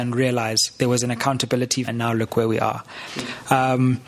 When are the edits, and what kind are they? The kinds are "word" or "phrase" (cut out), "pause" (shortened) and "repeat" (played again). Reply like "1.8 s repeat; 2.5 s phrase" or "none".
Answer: 1.8 s word